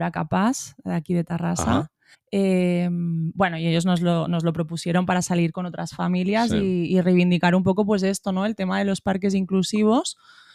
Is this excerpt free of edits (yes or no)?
no